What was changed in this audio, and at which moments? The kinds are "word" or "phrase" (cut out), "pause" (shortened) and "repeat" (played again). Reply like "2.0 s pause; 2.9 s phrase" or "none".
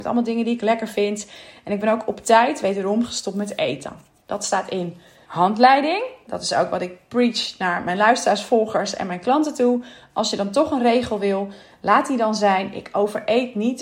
5.3 s word